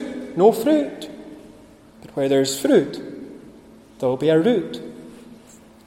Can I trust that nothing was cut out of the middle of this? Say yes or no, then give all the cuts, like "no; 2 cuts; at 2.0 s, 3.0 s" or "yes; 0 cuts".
yes; 0 cuts